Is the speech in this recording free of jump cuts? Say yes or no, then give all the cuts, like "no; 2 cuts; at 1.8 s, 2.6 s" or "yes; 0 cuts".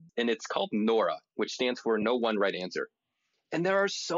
yes; 0 cuts